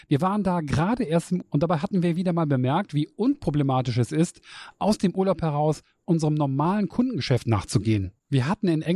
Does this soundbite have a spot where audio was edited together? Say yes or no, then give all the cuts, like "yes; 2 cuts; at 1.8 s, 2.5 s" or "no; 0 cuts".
yes; 1 cut; at 1.4 s